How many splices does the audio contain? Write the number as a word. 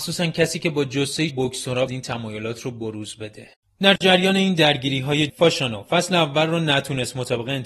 four